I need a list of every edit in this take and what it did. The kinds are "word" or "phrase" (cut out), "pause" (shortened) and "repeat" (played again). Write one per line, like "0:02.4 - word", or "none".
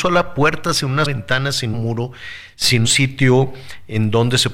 0:01.0 - word
0:01.7 - phrase
0:02.8 - word

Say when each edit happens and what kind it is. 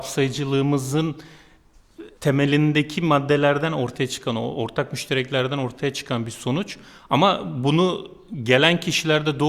0:02.2 - pause

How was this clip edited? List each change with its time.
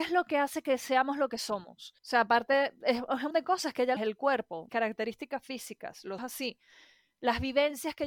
0:02.0 - pause
0:03.3 - word
0:04.0 - phrase
0:04.7 - word
0:06.2 - phrase

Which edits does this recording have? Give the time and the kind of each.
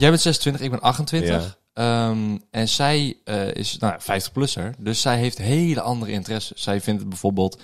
none

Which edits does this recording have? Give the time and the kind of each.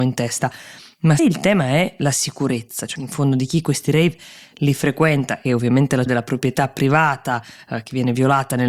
0:01.2 - word
0:02.9 - word
0:05.5 - word
0:06.1 - word

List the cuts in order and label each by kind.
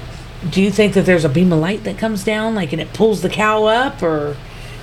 none

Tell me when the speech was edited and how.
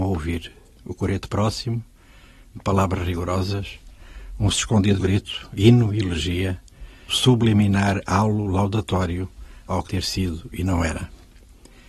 0:04.5 - word
0:05.0 - word
0:07.1 - word
0:09.9 - word

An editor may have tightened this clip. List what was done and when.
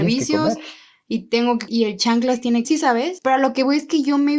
0:01.7 - word
0:02.6 - phrase

